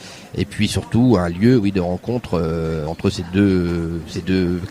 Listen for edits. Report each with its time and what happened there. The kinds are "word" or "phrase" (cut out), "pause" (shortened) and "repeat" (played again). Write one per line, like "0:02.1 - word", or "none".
0:02.9 - word